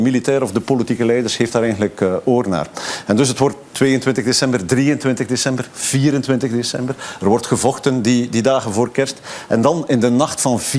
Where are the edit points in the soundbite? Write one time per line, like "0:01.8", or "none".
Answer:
0:03.7

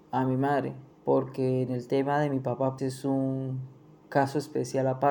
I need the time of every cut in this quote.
0:00.9
0:02.8

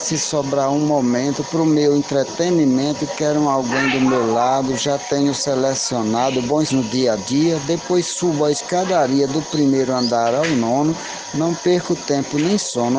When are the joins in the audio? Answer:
0:06.7

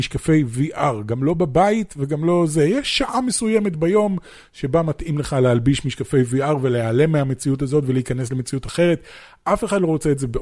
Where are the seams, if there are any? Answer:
none

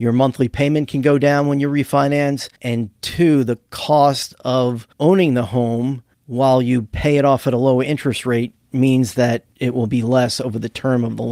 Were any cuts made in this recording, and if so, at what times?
0:02.6
0:04.9
0:06.1
0:09.5

